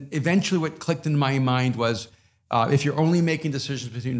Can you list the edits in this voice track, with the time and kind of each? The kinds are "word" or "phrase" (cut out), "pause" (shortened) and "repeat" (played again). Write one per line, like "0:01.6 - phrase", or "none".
none